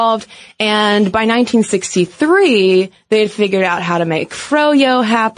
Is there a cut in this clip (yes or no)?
no